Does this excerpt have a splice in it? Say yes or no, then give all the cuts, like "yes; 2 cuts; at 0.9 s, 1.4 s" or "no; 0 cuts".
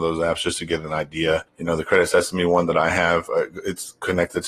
yes; 1 cut; at 1.5 s